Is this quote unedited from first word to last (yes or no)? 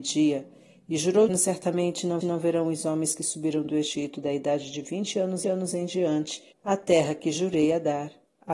no